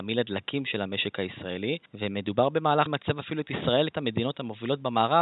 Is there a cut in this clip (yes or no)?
yes